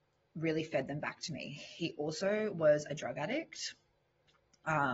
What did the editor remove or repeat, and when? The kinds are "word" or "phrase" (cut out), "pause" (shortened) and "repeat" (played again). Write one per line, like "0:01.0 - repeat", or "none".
none